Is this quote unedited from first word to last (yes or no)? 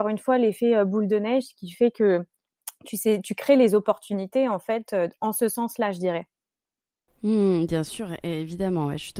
yes